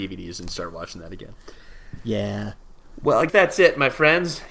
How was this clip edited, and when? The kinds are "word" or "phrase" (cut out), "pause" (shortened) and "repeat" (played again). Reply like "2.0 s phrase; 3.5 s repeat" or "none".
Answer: 3.3 s word

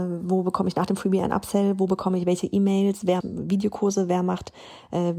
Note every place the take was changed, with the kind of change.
3.2 s word

